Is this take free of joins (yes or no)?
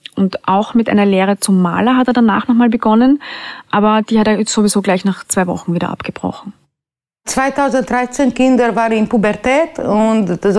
yes